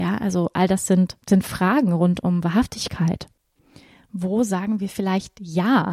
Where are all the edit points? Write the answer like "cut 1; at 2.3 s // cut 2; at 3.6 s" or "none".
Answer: none